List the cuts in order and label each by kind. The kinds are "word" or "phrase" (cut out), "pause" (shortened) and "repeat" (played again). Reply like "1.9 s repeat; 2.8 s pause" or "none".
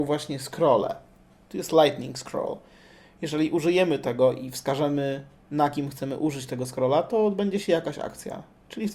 none